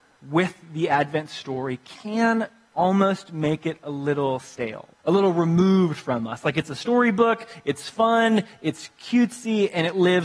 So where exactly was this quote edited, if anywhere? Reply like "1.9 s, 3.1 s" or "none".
5.0 s